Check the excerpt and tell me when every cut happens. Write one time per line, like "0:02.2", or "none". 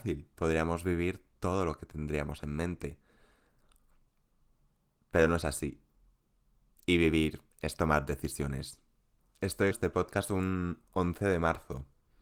0:07.5
0:09.7